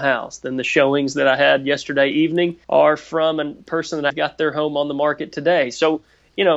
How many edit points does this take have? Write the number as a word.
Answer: two